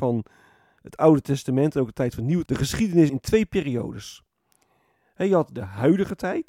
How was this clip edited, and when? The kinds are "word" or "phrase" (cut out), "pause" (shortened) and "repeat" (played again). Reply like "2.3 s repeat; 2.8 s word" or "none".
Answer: 2.4 s word; 3.1 s word